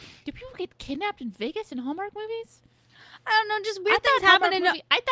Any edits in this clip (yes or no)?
no